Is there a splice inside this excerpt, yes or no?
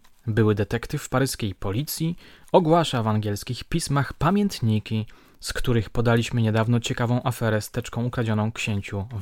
no